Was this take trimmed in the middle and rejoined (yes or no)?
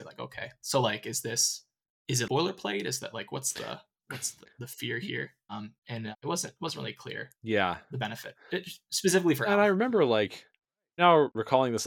yes